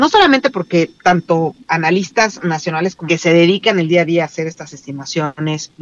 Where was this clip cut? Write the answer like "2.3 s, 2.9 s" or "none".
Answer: 3.1 s